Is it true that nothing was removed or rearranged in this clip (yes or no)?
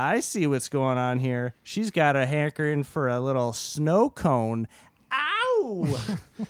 no